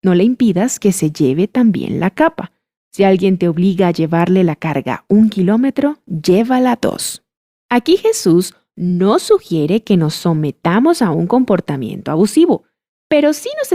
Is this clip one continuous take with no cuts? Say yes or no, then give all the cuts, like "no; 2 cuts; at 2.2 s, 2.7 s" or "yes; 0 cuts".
yes; 0 cuts